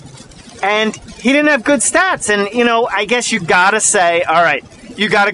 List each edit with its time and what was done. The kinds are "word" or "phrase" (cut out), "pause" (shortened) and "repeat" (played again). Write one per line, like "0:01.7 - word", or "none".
none